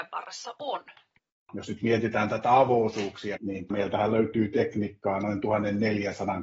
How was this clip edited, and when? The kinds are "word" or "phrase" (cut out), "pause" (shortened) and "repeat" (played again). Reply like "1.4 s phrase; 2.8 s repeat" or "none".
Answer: none